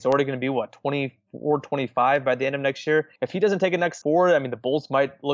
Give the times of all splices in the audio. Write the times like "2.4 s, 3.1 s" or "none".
3.2 s, 4.0 s